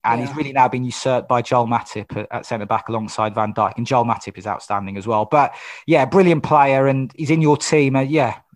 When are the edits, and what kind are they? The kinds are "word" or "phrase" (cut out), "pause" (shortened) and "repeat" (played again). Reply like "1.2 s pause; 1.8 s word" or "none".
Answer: none